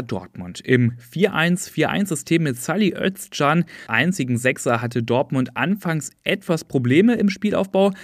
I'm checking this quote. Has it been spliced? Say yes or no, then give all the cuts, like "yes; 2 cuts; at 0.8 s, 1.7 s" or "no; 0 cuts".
yes; 1 cut; at 3.9 s